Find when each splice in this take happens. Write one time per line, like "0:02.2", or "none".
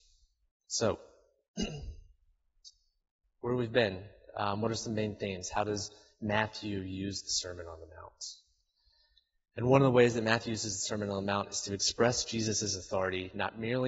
none